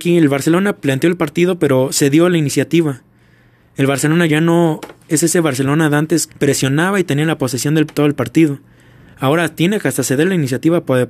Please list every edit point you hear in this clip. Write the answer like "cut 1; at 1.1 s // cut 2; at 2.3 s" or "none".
cut 1; at 4.3 s // cut 2; at 6.3 s